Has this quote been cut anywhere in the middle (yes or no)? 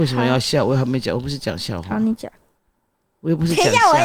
no